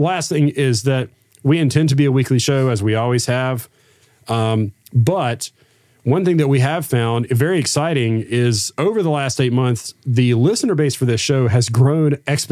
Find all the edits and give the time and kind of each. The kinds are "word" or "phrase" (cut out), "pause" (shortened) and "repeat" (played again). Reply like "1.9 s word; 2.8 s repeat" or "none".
none